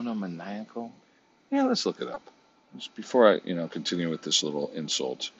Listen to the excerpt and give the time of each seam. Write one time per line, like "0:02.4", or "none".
0:01.0
0:02.5